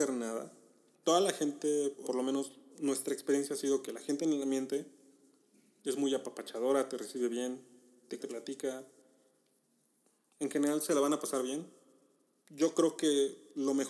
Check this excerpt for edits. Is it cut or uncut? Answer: cut